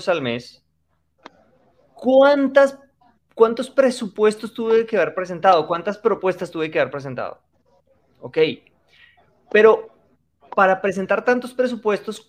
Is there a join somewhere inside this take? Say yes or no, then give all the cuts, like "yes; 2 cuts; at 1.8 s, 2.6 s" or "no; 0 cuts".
no; 0 cuts